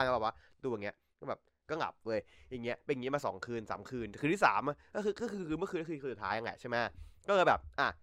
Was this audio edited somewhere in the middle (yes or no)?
no